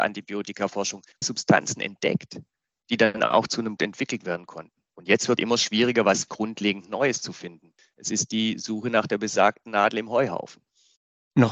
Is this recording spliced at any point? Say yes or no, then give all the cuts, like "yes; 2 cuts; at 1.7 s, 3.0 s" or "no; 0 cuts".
yes; 4 cuts; at 1.2 s, 3.8 s, 5.4 s, 6.3 s